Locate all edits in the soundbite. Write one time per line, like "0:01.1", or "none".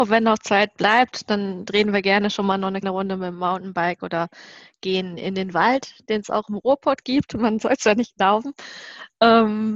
0:02.8